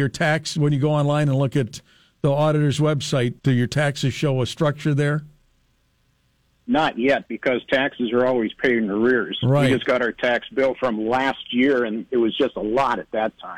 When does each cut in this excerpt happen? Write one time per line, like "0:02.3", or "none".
0:03.4

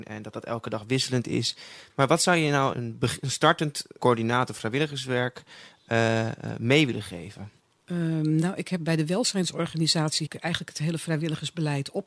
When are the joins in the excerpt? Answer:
0:02.7
0:04.0
0:07.6
0:10.3

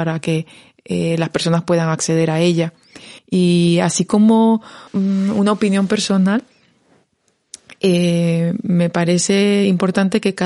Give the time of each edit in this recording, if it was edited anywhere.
0:03.2
0:04.9

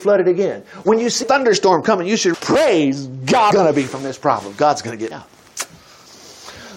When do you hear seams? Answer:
0:01.2
0:02.3
0:03.5
0:03.9
0:05.1

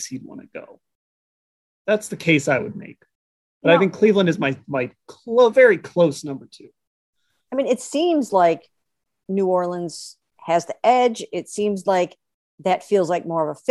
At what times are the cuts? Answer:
none

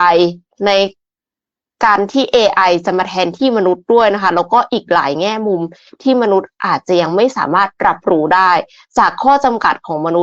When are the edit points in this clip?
none

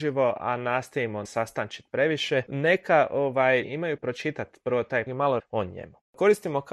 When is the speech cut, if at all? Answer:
0:01.2
0:03.6
0:04.0
0:05.1
0:05.4

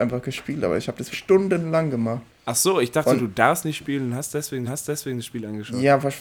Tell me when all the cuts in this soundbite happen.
0:01.1
0:02.3
0:04.7

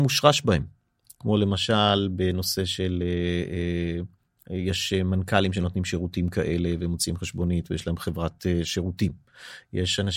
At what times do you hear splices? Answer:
none

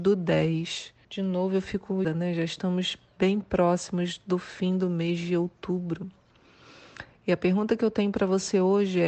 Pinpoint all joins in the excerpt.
0:01.0
0:02.0

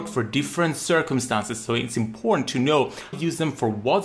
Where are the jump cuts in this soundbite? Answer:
0:03.1

